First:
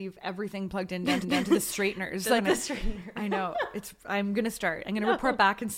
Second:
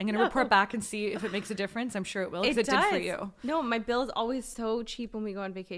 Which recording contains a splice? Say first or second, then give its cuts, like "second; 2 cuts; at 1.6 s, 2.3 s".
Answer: first; 2 cuts; at 1.2 s, 2.4 s